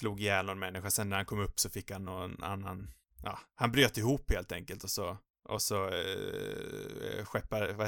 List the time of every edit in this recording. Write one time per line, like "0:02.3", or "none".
none